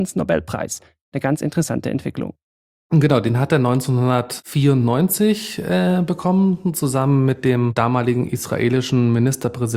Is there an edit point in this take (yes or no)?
no